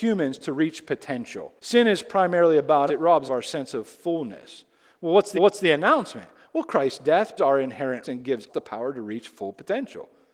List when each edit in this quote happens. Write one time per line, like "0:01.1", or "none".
0:01.6
0:02.9
0:03.3
0:05.3
0:07.4
0:08.0
0:08.5